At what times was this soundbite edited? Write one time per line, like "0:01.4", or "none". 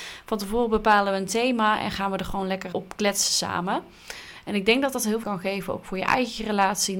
0:02.7
0:05.2